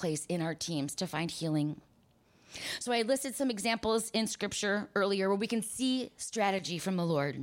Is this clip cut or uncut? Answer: uncut